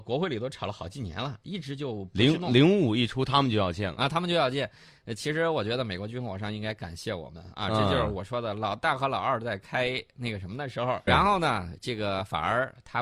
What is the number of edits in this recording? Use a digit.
1